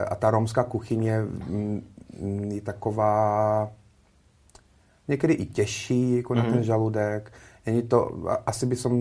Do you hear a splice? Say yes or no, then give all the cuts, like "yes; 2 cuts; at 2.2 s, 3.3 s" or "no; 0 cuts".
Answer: no; 0 cuts